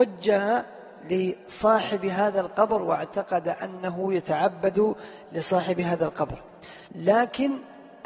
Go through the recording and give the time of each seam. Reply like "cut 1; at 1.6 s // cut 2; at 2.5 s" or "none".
cut 1; at 6.9 s

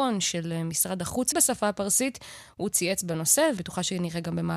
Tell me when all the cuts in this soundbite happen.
cut 1; at 1.3 s // cut 2; at 3.6 s

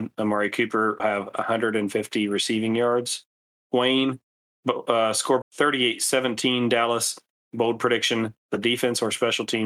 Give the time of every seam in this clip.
cut 1; at 1.0 s // cut 2; at 3.6 s // cut 3; at 5.4 s

